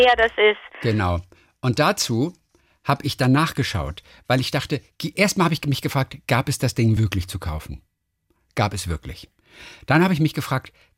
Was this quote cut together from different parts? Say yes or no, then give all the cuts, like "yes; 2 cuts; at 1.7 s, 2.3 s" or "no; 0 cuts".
no; 0 cuts